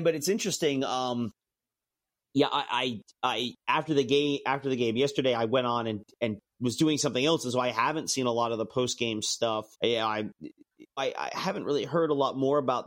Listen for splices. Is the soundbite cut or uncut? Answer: cut